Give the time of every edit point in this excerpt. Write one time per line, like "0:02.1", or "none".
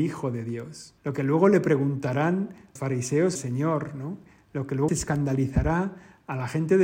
0:01.0
0:02.8
0:03.4
0:04.9